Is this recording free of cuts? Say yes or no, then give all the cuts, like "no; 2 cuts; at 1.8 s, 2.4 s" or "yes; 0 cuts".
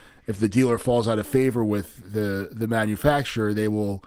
yes; 0 cuts